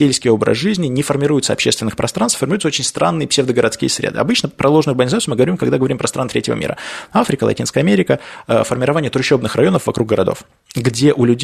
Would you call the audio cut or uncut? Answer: uncut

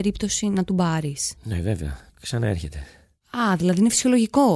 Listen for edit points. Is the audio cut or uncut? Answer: cut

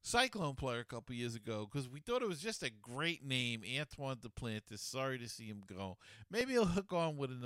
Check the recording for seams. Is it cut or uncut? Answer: uncut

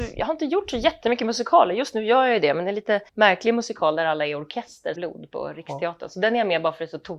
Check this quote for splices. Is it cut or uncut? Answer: cut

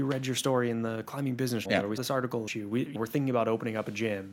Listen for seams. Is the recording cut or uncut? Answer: cut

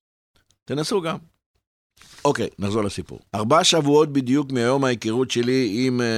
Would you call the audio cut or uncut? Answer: cut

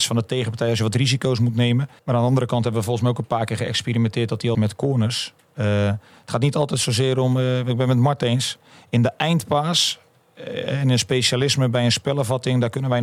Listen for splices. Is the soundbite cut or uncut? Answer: cut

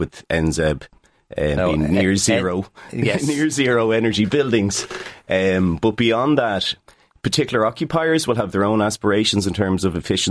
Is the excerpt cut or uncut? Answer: uncut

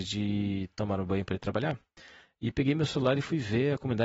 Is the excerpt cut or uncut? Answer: uncut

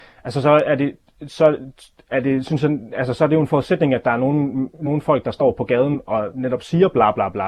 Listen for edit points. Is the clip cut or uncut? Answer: uncut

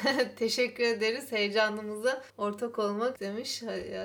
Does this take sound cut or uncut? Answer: cut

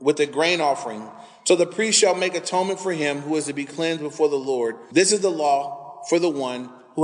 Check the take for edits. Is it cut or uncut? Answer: uncut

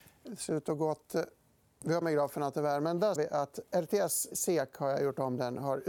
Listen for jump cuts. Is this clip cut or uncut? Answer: cut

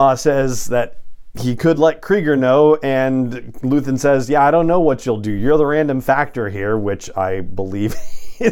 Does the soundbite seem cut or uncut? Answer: uncut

